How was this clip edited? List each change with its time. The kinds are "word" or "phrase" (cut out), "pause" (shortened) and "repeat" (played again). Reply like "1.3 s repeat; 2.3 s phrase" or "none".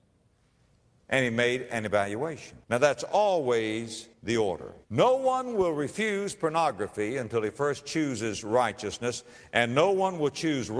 2.6 s pause; 4.1 s pause; 4.8 s pause